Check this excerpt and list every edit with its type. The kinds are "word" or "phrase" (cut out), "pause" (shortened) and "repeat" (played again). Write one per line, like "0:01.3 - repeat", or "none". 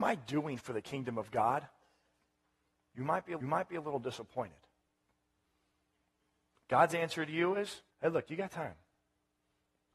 0:03.4 - repeat
0:07.9 - pause